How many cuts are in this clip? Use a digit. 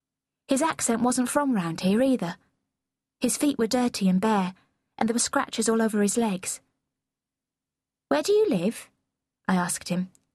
0